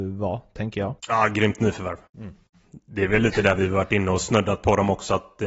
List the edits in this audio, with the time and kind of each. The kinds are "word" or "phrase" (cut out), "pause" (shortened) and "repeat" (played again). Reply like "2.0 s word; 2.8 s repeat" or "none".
1.0 s pause; 2.1 s pause